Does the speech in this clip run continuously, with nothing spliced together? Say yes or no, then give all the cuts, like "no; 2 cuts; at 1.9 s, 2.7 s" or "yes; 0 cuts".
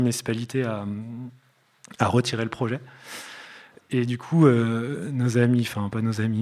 yes; 0 cuts